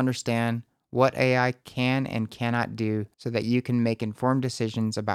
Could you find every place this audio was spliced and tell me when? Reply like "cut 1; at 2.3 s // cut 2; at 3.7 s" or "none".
cut 1; at 3.1 s